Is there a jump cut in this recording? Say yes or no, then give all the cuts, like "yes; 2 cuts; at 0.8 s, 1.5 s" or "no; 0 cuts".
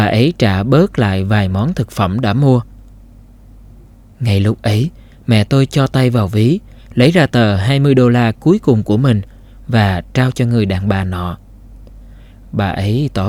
no; 0 cuts